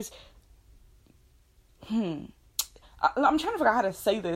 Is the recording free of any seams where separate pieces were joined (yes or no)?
yes